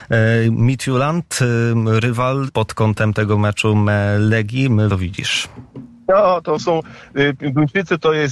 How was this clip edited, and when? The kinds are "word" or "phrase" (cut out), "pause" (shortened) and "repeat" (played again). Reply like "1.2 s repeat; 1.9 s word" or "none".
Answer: 2.5 s word; 4.9 s phrase